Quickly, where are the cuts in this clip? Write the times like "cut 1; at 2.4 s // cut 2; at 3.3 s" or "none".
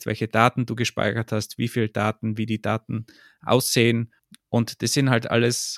none